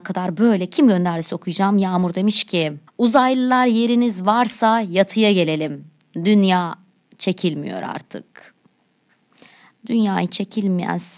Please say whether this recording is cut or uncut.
cut